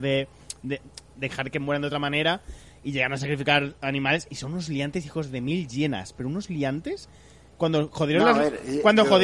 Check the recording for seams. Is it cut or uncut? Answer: uncut